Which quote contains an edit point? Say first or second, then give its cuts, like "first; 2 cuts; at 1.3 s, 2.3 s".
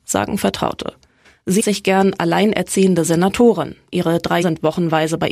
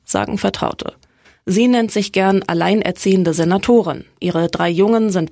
first; 2 cuts; at 1.6 s, 4.4 s